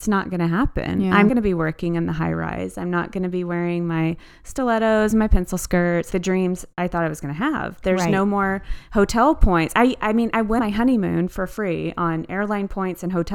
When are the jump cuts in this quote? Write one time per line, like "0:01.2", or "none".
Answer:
0:01.3
0:06.1
0:10.6